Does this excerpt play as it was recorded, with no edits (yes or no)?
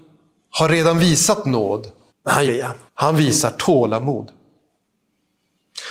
no